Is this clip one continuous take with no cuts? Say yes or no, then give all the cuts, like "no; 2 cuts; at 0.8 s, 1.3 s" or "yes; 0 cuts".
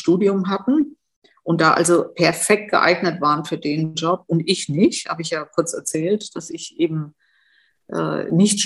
yes; 0 cuts